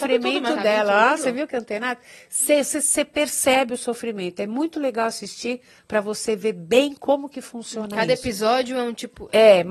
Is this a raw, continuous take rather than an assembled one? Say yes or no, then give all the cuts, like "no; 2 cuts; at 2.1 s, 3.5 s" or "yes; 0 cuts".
yes; 0 cuts